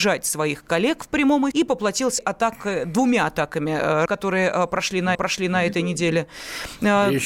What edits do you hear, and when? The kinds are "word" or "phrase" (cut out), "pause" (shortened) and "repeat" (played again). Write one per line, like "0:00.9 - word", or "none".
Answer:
0:01.5 - word
0:02.2 - phrase
0:04.1 - word
0:05.1 - repeat